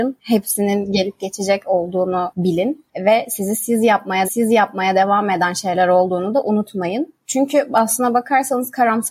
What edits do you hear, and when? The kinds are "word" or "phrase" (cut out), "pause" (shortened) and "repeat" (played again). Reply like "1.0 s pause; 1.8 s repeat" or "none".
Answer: 4.2 s repeat